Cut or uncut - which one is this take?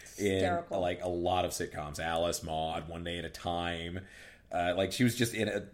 uncut